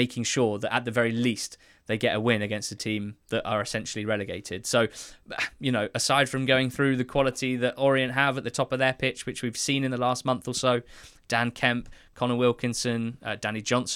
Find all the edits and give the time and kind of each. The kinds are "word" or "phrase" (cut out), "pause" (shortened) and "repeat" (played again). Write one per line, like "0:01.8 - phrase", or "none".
none

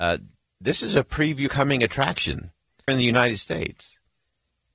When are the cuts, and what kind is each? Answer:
0:01.5 - word
0:02.9 - word

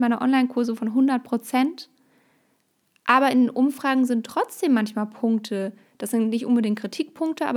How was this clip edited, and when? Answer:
none

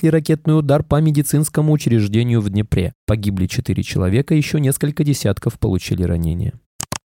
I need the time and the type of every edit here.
none

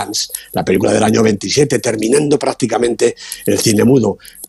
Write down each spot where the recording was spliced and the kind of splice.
none

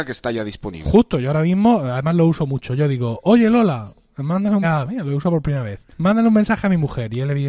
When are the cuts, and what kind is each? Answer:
0:04.6 - word
0:05.9 - pause

